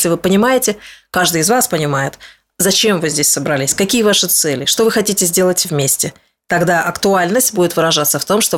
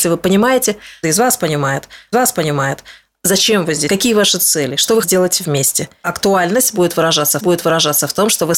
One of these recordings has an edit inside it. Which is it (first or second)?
second